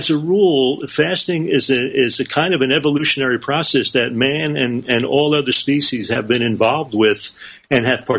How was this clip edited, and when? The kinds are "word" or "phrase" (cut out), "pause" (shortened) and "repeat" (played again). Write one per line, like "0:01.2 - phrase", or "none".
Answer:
none